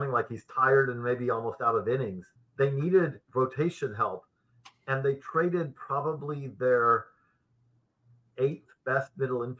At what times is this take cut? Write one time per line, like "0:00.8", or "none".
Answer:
0:02.4
0:03.3